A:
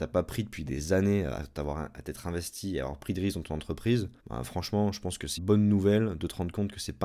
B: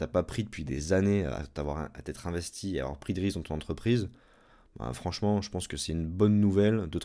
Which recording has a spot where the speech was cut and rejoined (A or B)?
A